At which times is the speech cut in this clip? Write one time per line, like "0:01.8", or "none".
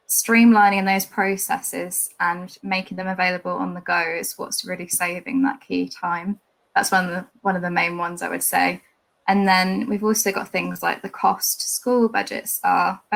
none